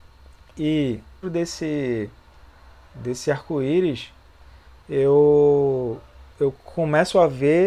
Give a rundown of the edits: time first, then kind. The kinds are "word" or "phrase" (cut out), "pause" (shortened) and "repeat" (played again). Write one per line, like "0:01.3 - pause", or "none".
0:01.2 - word
0:06.3 - pause